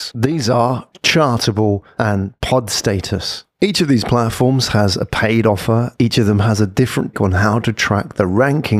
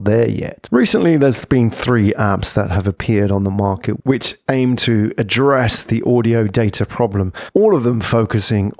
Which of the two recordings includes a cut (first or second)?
first